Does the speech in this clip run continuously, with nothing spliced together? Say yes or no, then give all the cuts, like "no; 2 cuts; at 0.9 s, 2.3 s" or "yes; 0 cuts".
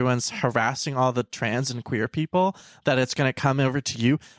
yes; 0 cuts